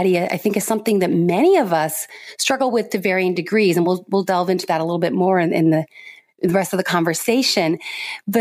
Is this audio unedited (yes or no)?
yes